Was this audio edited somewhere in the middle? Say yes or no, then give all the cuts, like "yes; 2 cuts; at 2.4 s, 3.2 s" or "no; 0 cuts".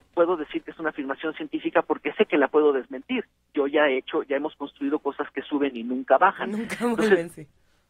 no; 0 cuts